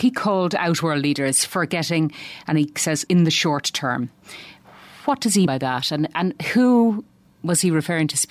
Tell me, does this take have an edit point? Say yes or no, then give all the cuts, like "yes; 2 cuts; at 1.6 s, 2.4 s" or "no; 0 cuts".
yes; 2 cuts; at 3.1 s, 5.5 s